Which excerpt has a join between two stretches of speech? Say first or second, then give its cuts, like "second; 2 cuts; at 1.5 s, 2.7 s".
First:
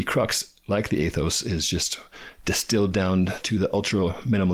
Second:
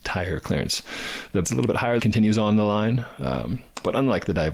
second; 2 cuts; at 1.4 s, 2.0 s